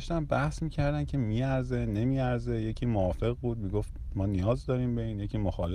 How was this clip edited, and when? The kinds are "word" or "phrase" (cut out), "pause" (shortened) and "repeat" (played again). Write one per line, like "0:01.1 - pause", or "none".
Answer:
none

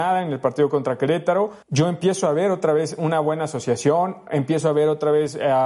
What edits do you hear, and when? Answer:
0:01.6 - pause

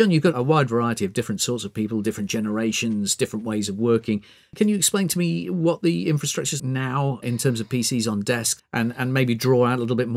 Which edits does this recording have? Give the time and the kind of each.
0:06.6 - word
0:07.2 - word
0:08.6 - word

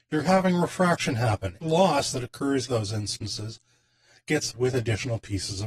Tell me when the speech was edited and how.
0:01.6 - phrase
0:02.7 - phrase
0:04.5 - word

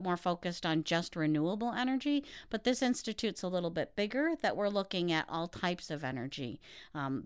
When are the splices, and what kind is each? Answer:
none

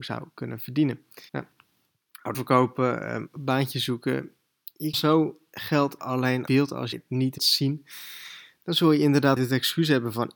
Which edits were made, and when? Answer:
0:01.3 - pause
0:02.3 - word
0:04.9 - word
0:06.0 - word
0:06.5 - phrase
0:06.9 - word
0:07.4 - word
0:09.4 - word

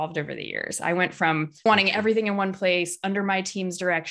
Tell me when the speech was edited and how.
0:01.7 - word

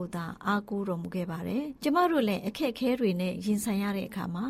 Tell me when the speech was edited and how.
0:01.8 - pause

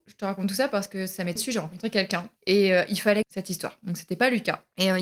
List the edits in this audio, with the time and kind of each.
0:01.4 - word
0:02.4 - pause
0:03.2 - phrase

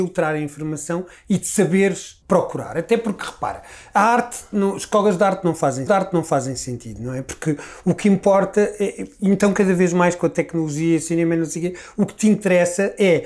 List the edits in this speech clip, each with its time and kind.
0:02.2 - pause
0:05.9 - repeat

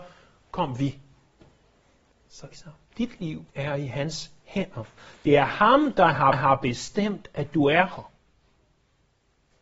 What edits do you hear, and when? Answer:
0:02.5 - phrase
0:02.9 - pause
0:03.5 - pause
0:06.3 - repeat

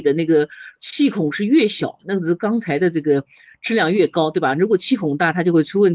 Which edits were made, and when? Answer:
none

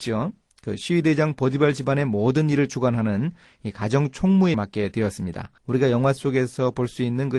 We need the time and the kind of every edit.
0:04.5 - word
0:05.6 - pause

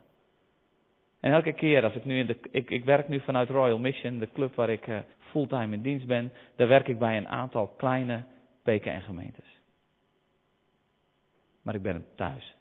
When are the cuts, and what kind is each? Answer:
0:05.1 - pause

